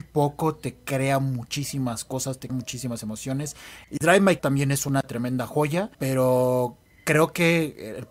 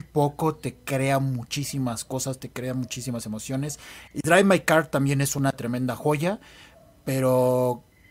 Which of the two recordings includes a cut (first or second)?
first